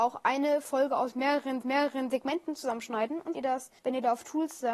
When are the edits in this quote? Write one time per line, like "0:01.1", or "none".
0:01.6
0:03.3
0:03.8